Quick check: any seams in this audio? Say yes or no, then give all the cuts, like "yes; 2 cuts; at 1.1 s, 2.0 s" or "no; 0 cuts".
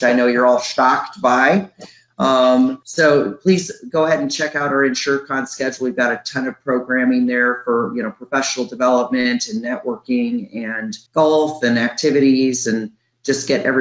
yes; 2 cuts; at 2.8 s, 11.1 s